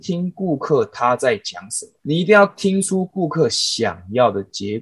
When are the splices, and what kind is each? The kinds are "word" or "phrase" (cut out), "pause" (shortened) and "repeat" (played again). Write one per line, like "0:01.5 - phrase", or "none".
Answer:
0:02.0 - pause